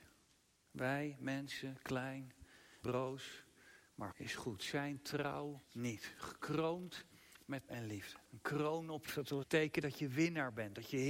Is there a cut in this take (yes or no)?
yes